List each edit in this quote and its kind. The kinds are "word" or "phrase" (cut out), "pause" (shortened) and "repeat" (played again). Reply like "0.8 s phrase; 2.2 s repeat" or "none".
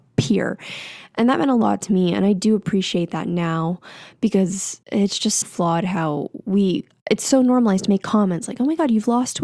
4.8 s pause; 5.4 s word